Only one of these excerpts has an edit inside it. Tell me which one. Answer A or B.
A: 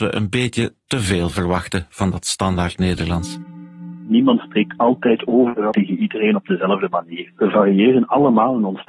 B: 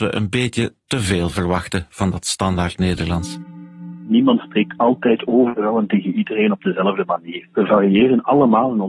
A